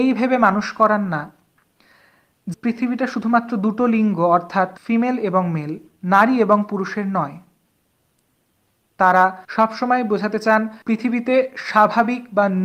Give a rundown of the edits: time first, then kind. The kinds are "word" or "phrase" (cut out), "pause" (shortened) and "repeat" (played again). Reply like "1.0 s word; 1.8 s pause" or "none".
2.5 s word; 4.8 s pause; 9.4 s pause; 10.8 s pause